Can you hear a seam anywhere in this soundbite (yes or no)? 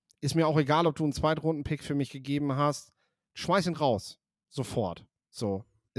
no